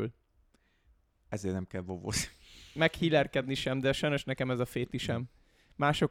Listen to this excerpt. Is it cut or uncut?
uncut